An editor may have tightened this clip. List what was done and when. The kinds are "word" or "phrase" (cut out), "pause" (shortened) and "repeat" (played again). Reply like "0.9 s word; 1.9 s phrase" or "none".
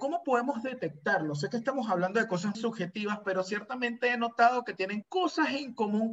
2.5 s word; 5.0 s word